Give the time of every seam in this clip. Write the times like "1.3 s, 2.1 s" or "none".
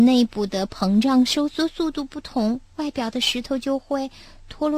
2.7 s